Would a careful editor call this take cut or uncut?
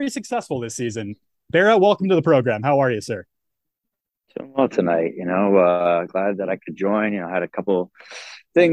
uncut